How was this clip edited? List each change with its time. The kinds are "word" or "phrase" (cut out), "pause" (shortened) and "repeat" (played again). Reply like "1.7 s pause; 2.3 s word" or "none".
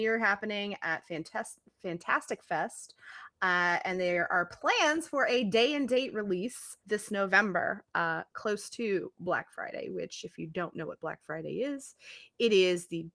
6.8 s pause

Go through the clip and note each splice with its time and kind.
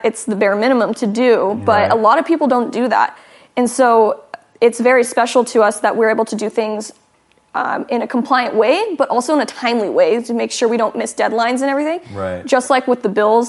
none

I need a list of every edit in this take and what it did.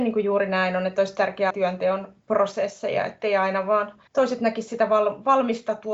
1.5 s phrase; 4.1 s pause

